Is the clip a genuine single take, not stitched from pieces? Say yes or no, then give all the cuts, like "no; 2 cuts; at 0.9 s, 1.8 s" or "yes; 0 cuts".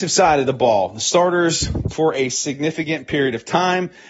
no; 1 cut; at 1.9 s